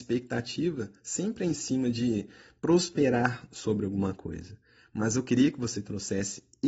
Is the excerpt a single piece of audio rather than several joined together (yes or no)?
yes